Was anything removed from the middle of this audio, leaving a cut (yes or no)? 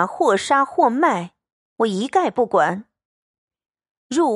no